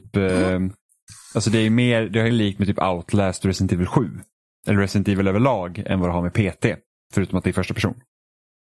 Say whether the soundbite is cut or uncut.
cut